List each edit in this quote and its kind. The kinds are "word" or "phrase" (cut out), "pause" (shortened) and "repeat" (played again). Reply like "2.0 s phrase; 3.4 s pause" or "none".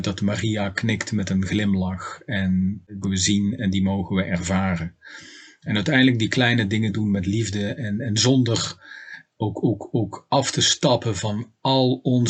3.0 s phrase